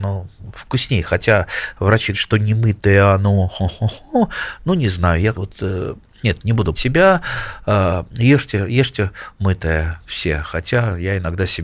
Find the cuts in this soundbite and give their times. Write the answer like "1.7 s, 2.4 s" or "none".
2.1 s, 5.3 s, 6.8 s